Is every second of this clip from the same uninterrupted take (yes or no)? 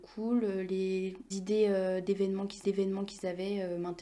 no